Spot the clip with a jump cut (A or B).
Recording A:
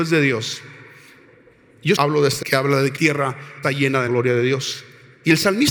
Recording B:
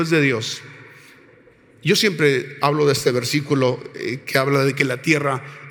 A